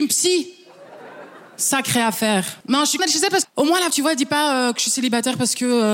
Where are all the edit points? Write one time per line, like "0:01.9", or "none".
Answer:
0:02.6
0:03.0
0:03.4
0:03.9